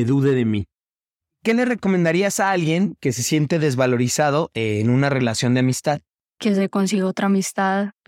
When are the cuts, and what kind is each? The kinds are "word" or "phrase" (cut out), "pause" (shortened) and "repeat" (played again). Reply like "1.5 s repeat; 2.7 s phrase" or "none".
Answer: none